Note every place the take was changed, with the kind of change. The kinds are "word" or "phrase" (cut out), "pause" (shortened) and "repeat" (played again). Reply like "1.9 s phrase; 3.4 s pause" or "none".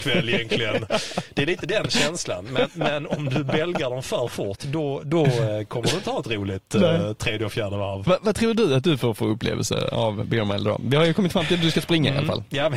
none